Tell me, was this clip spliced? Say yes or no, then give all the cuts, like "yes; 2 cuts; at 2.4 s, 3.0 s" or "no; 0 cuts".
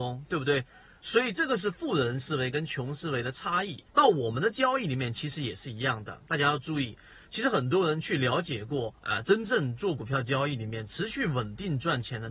yes; 2 cuts; at 3.9 s, 9.0 s